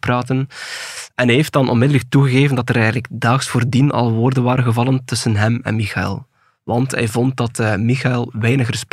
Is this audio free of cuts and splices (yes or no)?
yes